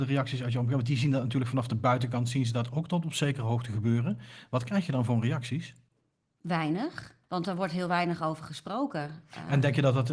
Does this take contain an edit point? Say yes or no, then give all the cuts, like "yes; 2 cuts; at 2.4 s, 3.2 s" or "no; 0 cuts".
yes; 1 cut; at 7.2 s